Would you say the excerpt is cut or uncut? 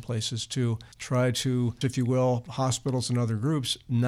cut